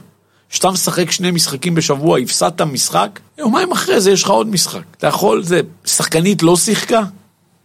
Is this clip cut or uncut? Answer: cut